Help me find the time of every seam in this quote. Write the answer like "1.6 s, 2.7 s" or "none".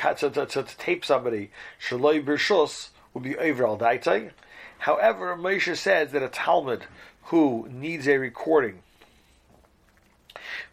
none